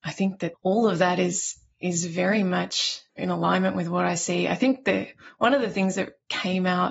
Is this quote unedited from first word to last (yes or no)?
no